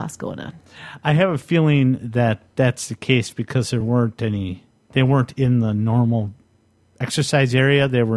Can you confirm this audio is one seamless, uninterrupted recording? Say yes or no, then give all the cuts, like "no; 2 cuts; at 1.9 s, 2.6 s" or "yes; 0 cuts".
yes; 0 cuts